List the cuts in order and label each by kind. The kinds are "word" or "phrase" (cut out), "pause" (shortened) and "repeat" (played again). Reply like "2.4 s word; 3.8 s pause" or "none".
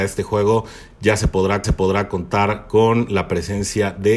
1.6 s repeat